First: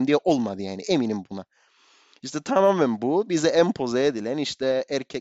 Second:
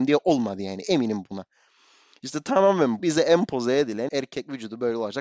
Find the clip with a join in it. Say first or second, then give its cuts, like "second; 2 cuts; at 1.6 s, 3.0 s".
second; 2 cuts; at 3.0 s, 4.1 s